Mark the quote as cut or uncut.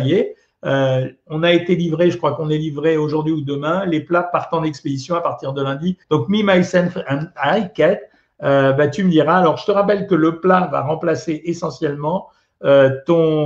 cut